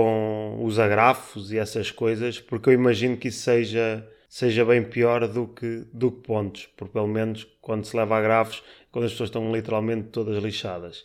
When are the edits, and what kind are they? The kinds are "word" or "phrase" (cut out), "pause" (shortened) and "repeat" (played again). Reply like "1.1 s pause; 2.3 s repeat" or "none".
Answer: none